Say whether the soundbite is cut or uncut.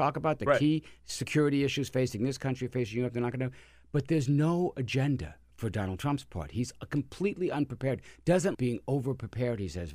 cut